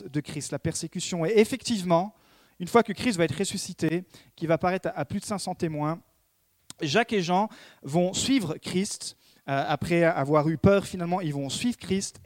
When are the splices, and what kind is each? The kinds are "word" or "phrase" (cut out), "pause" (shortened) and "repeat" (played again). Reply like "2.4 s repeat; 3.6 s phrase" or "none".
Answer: none